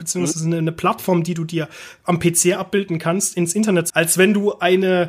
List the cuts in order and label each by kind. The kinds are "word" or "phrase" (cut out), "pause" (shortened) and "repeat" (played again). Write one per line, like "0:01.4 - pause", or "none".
0:03.9 - word